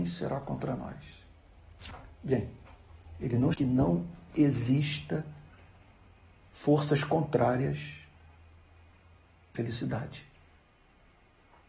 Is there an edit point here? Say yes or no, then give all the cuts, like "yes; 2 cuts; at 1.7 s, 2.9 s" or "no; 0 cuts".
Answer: yes; 2 cuts; at 3.5 s, 9.5 s